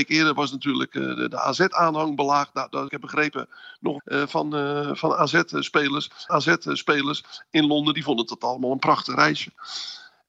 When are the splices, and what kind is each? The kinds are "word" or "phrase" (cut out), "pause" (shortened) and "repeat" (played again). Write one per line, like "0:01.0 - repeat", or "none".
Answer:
0:02.9 - phrase
0:04.0 - phrase
0:06.3 - repeat